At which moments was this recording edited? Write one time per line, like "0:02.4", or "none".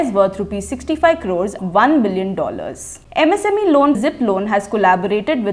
0:01.6
0:03.0
0:03.9

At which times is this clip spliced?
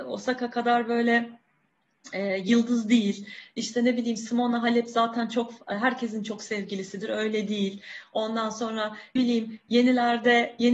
0:09.2

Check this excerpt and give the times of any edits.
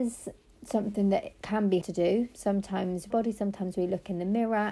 0:01.8
0:03.1

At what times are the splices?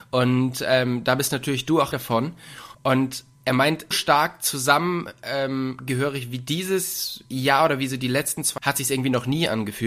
0:01.9
0:02.7
0:03.9
0:08.6

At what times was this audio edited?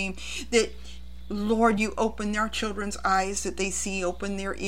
none

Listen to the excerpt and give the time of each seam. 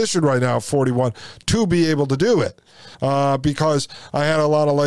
0:02.9

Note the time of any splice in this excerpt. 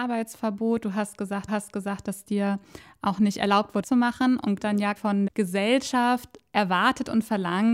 0:01.5
0:03.8
0:04.6
0:05.0
0:05.3

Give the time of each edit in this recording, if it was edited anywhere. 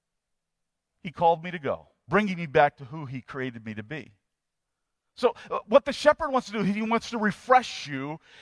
none

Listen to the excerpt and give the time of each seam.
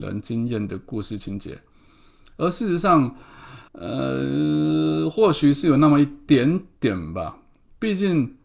0:03.7

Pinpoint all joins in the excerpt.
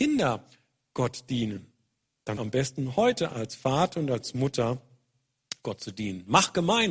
0:02.4
0:03.3

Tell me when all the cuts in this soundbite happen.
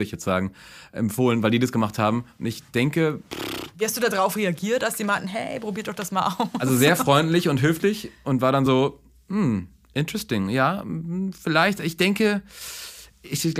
none

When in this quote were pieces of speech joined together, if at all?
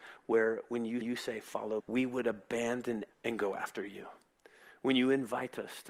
0:01.0
0:01.8
0:03.1

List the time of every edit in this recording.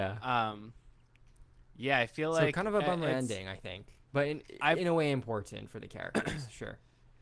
0:04.1

